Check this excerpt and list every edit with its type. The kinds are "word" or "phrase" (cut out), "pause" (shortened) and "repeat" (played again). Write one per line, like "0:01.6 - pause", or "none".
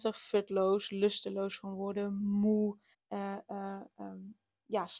0:02.9 - pause